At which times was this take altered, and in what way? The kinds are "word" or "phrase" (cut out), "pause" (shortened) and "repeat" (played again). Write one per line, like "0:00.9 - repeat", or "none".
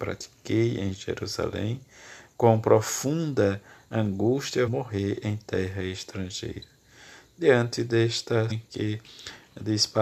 0:04.7 - word
0:08.5 - word